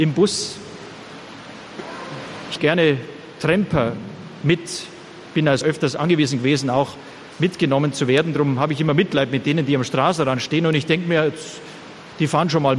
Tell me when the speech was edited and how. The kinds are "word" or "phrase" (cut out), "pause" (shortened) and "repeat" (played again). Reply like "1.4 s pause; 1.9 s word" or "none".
2.6 s word; 5.6 s word